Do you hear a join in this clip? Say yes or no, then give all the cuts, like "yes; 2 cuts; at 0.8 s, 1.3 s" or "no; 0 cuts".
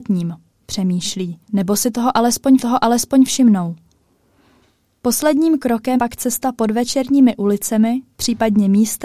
yes; 3 cuts; at 1.4 s, 2.6 s, 6.0 s